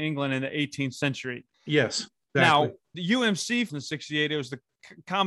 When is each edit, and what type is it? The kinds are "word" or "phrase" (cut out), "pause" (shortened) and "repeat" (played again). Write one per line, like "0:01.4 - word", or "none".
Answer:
0:01.5 - pause
0:02.9 - word
0:03.7 - phrase